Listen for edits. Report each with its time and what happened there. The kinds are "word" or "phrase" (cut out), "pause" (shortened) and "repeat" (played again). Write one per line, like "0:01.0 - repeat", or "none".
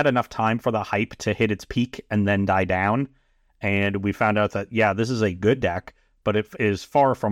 none